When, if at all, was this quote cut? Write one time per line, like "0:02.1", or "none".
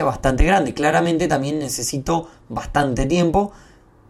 none

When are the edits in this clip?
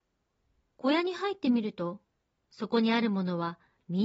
none

